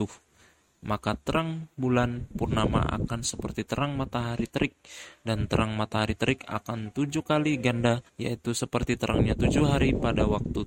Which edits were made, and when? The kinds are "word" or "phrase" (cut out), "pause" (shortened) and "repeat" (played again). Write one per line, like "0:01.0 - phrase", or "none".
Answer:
0:08.1 - pause